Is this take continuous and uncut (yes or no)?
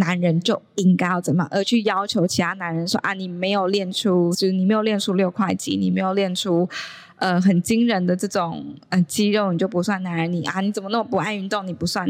no